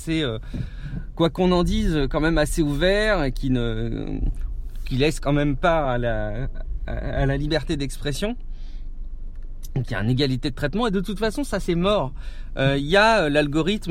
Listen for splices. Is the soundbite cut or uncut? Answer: uncut